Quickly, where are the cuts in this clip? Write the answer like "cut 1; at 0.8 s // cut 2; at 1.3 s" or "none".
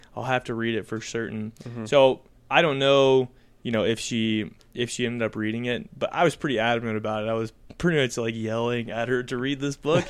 none